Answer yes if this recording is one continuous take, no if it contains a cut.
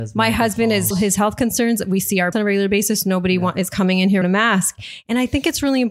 no